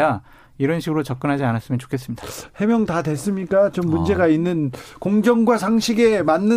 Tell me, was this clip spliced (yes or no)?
no